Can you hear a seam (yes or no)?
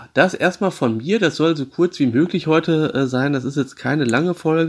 no